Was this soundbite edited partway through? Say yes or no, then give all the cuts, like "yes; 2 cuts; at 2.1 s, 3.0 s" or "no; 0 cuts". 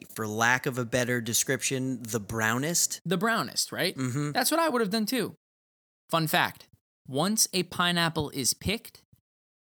no; 0 cuts